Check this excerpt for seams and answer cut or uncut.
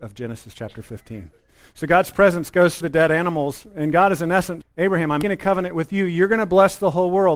cut